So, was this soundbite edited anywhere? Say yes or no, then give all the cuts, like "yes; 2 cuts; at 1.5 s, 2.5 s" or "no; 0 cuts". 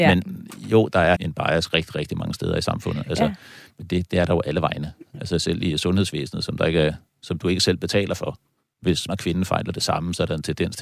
yes; 2 cuts; at 1.2 s, 9.1 s